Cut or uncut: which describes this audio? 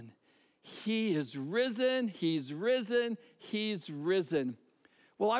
uncut